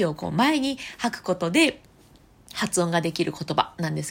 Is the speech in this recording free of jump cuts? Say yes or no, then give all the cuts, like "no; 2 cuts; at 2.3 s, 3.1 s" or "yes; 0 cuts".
yes; 0 cuts